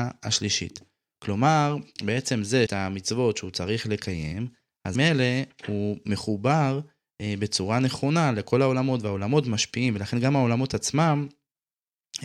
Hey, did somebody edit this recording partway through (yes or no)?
yes